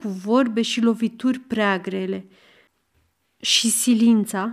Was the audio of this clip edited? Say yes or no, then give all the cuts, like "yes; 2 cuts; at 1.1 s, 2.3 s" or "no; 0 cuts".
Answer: no; 0 cuts